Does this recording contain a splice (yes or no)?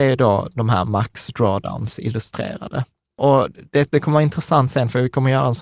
no